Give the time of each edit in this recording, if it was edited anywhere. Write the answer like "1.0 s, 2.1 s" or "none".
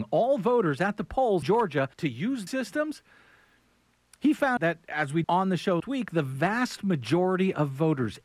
1.4 s, 1.9 s, 2.5 s, 4.6 s, 5.2 s, 5.8 s